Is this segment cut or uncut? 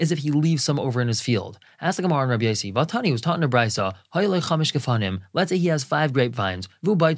uncut